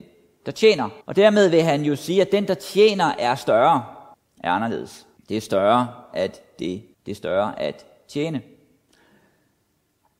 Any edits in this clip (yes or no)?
yes